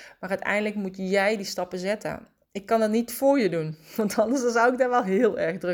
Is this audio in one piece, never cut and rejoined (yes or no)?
no